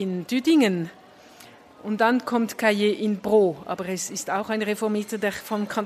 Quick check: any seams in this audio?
no; 0 cuts

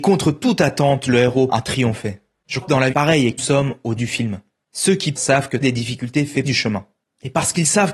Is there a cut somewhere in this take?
yes; 8 cuts; at 1.5 s, 2.6 s, 2.9 s, 3.4 s, 4.0 s, 5.2 s, 5.6 s, 6.4 s

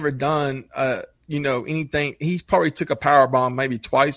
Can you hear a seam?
no; 0 cuts

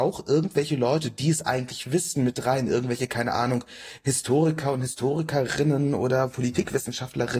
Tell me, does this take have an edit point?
no; 0 cuts

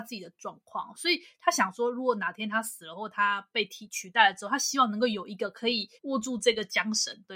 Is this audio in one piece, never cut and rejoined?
no; 1 cut; at 6.0 s

